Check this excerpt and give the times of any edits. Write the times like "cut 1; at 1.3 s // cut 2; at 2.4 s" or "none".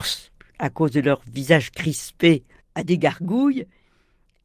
none